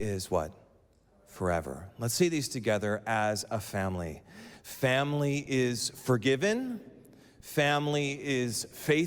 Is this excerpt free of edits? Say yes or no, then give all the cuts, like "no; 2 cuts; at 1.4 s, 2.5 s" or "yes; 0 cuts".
yes; 0 cuts